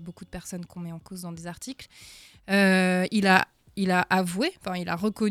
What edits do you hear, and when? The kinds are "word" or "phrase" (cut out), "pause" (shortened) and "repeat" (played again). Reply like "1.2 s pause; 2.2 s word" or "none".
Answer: none